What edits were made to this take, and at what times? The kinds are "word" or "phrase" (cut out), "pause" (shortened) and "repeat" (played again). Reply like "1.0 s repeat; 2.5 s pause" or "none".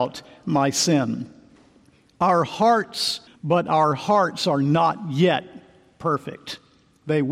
3.3 s phrase